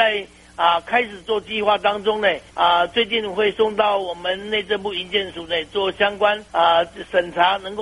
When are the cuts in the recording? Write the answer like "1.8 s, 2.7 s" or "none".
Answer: 2.5 s, 6.5 s